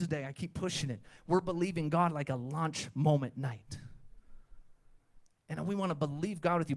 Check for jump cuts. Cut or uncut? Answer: uncut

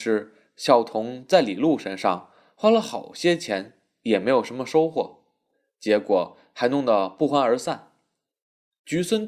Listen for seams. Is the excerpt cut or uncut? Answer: uncut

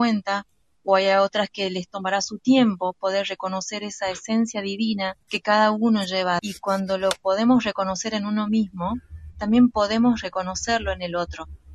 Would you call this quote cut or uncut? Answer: cut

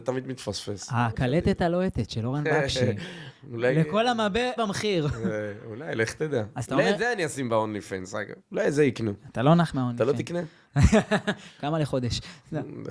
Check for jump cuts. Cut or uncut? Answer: cut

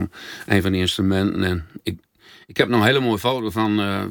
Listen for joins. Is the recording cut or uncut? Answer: uncut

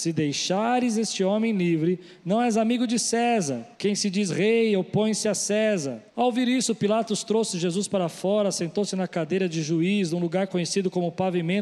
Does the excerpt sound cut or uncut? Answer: cut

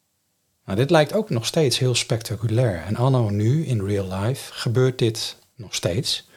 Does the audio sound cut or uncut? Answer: uncut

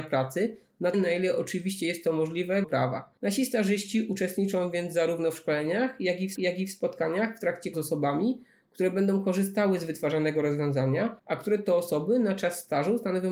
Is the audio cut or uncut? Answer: cut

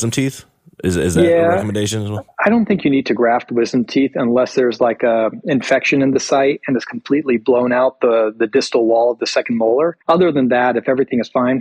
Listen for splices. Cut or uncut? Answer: cut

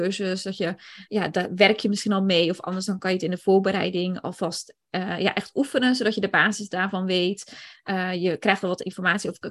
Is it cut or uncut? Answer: uncut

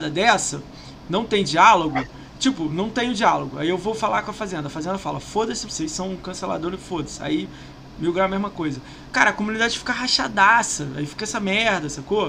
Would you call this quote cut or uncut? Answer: cut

